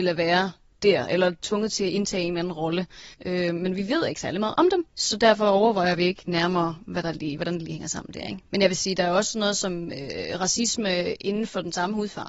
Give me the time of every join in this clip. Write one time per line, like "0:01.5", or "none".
0:03.1
0:04.9
0:08.5